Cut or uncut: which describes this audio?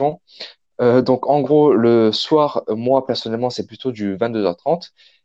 uncut